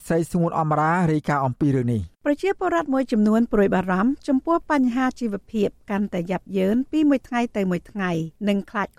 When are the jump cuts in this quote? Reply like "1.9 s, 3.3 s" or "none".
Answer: 2.1 s